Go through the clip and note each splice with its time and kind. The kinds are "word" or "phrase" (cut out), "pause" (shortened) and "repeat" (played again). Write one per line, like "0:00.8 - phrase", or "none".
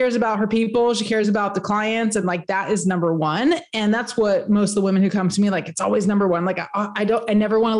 none